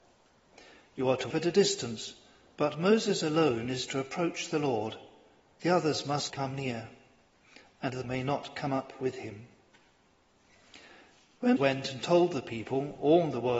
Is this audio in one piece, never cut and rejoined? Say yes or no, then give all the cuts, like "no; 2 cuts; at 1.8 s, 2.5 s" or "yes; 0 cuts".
no; 4 cuts; at 1.3 s, 6.3 s, 8.0 s, 11.6 s